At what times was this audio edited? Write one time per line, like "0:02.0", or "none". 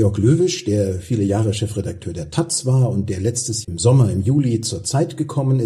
0:03.6